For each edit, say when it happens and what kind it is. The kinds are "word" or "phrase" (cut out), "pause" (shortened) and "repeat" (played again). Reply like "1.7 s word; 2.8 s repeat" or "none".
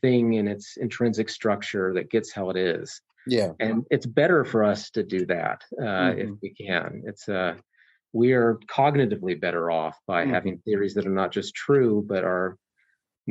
none